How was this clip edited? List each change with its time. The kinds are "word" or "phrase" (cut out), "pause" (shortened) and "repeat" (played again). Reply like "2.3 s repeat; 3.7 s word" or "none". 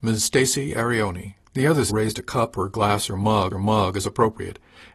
1.4 s pause; 1.9 s phrase; 3.5 s repeat